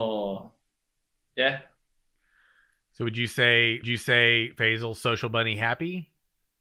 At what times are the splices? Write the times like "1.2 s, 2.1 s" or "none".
3.8 s